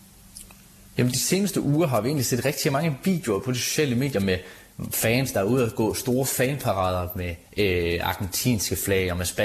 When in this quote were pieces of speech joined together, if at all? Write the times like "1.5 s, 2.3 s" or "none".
7.5 s